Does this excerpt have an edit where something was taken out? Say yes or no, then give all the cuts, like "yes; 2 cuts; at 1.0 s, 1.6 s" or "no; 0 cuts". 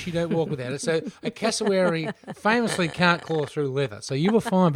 no; 0 cuts